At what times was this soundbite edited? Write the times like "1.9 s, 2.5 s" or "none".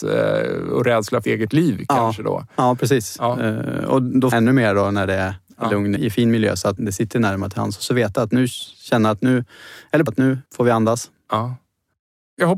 1.2 s, 4.3 s, 6.0 s, 6.8 s, 10.1 s, 10.5 s

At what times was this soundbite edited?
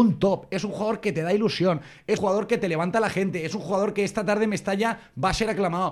2.2 s

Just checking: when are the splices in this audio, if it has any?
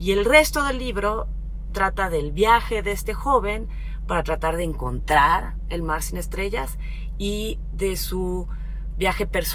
1.7 s

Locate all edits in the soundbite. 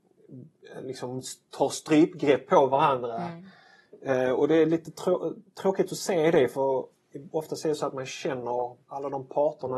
8.8 s

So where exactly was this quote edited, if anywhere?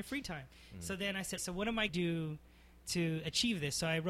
1.4 s, 1.9 s

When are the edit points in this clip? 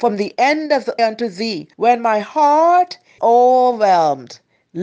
1.0 s, 1.7 s, 3.2 s

